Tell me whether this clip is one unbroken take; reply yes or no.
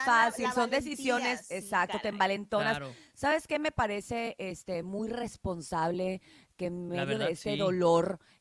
yes